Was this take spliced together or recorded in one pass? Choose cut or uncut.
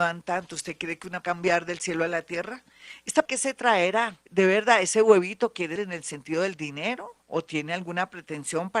cut